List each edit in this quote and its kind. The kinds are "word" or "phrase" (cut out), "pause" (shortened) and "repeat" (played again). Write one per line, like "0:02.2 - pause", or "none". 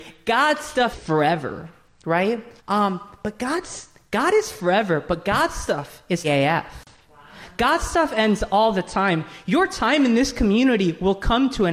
0:00.9 - word
0:02.6 - pause
0:06.2 - word